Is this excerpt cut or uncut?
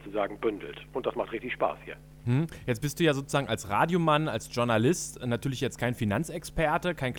uncut